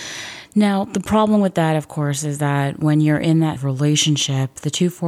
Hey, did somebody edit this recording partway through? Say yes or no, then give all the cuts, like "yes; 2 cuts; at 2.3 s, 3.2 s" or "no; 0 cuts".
yes; 1 cut; at 3.6 s